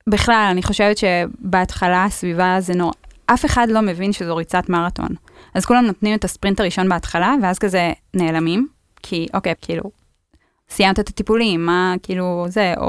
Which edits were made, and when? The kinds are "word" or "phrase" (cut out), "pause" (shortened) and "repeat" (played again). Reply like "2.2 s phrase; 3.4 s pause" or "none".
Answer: 9.6 s word